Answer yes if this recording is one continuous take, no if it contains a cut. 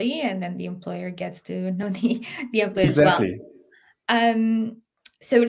yes